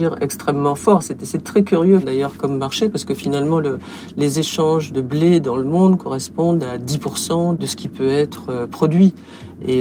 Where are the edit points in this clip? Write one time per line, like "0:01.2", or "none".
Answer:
none

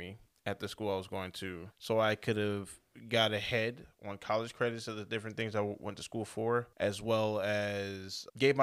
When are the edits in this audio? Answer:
none

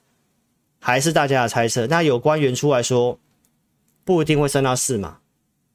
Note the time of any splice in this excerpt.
none

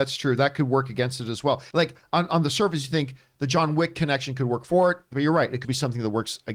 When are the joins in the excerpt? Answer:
0:05.6

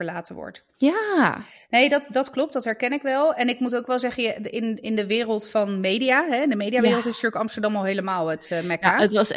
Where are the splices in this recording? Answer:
none

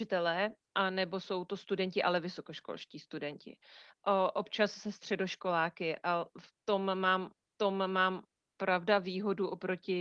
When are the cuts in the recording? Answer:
0:07.6

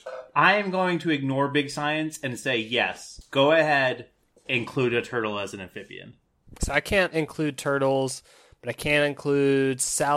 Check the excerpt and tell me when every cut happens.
0:06.6

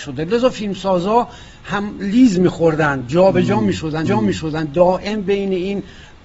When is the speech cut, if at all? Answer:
0:04.1

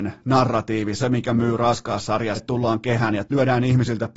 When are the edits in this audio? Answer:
0:01.0
0:02.4
0:03.3

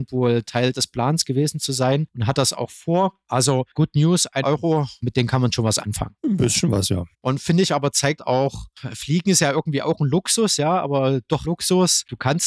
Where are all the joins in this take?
0:04.4
0:07.1
0:08.2
0:11.4

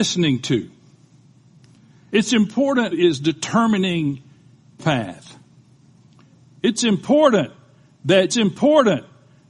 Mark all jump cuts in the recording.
0:02.9
0:04.8
0:08.3

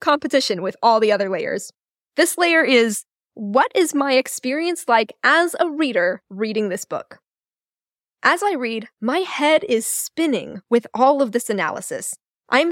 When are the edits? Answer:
0:01.9

